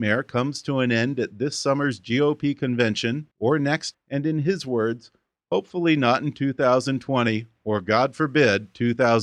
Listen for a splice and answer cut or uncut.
cut